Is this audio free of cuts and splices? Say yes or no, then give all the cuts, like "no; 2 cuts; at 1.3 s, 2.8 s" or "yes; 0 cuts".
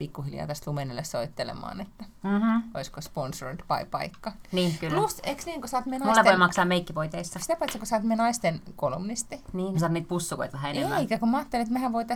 no; 1 cut; at 9.7 s